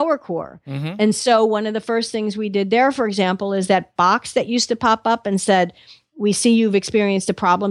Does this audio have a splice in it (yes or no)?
no